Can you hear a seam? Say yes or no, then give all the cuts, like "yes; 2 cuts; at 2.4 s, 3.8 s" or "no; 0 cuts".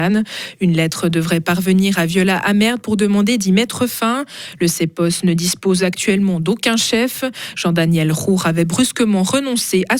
no; 0 cuts